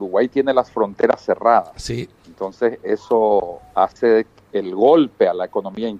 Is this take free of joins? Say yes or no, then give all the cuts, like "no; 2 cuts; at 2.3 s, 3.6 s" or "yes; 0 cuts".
no; 2 cuts; at 2.2 s, 4.4 s